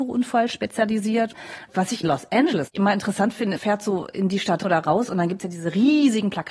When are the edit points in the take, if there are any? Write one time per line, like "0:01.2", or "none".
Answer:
0:02.0
0:03.6
0:04.6